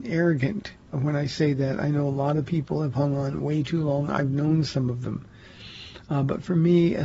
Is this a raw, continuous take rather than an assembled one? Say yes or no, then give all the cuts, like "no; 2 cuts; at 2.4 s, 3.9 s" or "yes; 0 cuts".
no; 1 cut; at 0.9 s